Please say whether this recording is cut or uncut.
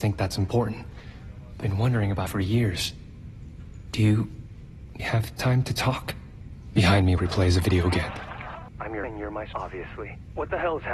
cut